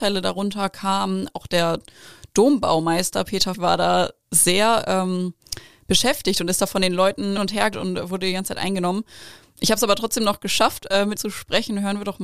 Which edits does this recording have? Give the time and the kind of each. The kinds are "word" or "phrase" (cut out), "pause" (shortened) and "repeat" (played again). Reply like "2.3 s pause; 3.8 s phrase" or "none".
3.5 s word; 7.4 s word; 7.7 s word; 11.2 s word

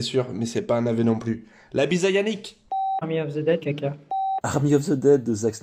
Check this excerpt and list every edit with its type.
3.6 s word

